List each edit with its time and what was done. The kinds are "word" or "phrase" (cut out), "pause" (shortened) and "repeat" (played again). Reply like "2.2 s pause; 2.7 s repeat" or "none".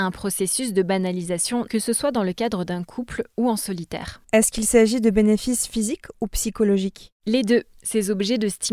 1.7 s phrase; 4.2 s pause